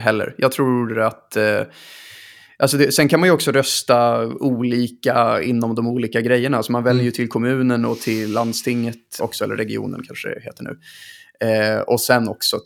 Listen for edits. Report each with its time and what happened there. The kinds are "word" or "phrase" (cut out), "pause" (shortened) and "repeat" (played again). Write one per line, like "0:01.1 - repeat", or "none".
0:09.2 - word